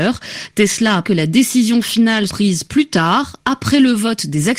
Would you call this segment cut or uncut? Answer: cut